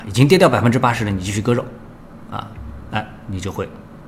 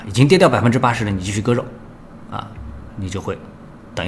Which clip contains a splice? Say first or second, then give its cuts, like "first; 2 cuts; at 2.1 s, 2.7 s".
second; 1 cut; at 2.9 s